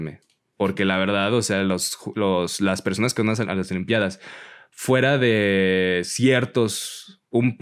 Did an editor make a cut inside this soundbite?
no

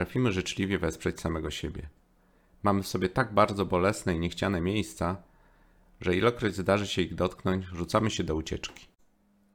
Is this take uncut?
yes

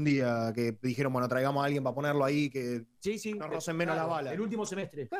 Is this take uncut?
yes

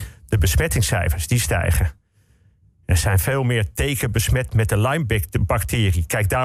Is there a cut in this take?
no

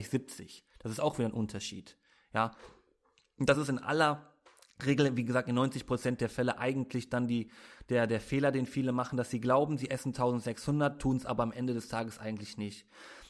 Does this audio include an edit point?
no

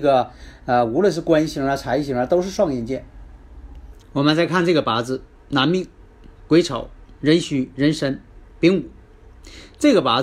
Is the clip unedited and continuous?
no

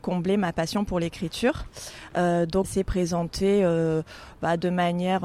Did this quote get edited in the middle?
yes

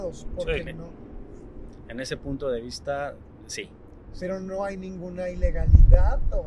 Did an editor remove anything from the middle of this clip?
no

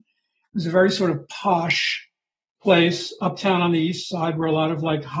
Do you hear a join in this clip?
no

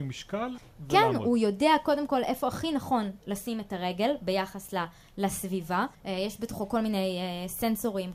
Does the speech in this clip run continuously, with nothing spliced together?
no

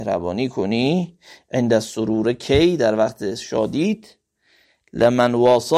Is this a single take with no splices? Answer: yes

